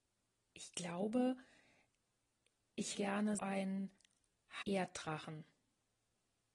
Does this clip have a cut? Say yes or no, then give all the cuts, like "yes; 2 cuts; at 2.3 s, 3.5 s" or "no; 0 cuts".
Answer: yes; 3 cuts; at 2.9 s, 3.4 s, 4.6 s